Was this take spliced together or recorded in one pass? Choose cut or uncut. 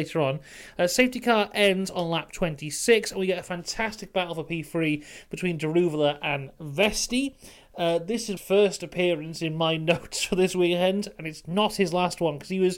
cut